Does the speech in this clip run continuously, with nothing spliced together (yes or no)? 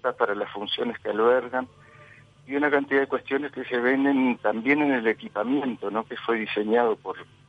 yes